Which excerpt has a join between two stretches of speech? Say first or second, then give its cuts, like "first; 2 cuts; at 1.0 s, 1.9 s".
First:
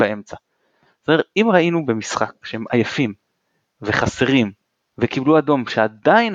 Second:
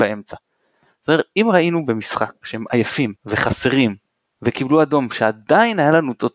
second; 1 cut; at 3.2 s